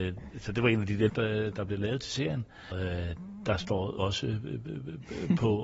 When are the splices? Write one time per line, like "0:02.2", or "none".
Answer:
0:01.1
0:01.5
0:02.7
0:04.0